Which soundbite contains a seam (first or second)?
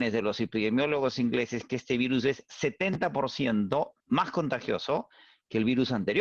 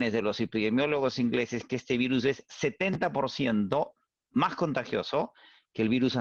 first